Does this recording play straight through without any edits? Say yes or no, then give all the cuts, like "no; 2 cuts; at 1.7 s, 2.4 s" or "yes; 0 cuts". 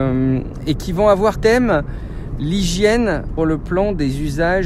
no; 2 cuts; at 1.4 s, 3.4 s